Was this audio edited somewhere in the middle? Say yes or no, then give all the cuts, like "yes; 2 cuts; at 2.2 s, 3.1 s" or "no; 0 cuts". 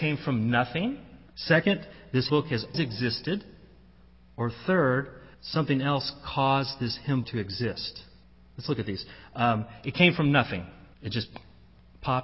yes; 7 cuts; at 1.3 s, 2.3 s, 2.7 s, 5.3 s, 7.2 s, 8.2 s, 10.9 s